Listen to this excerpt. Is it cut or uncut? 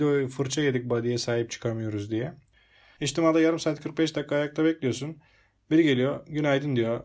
uncut